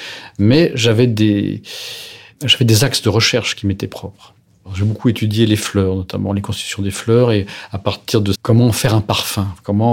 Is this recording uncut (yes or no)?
no